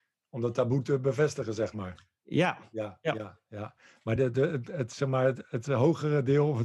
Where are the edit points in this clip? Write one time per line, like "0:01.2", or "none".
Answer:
none